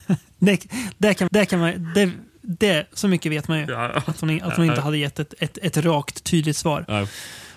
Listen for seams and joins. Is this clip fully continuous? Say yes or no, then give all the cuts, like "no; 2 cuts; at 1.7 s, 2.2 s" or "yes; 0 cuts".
no; 1 cut; at 1.3 s